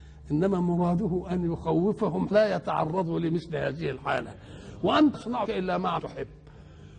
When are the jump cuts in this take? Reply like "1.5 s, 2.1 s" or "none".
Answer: 2.3 s, 5.1 s, 5.4 s, 6.0 s